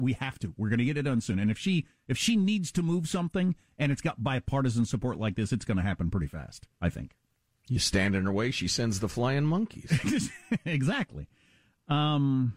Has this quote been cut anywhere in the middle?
yes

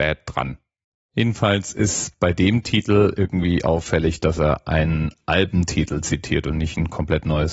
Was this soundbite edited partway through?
no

